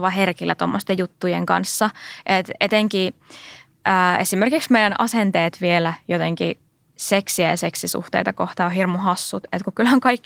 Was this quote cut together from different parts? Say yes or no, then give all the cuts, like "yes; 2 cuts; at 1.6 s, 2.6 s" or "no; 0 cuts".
no; 0 cuts